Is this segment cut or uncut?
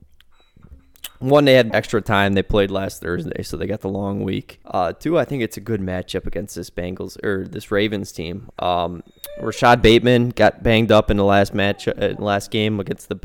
cut